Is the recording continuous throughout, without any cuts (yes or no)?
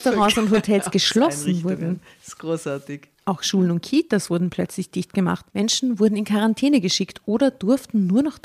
no